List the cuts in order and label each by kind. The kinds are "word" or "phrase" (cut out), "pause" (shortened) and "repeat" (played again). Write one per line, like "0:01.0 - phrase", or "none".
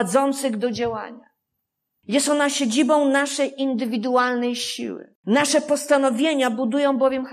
0:05.2 - pause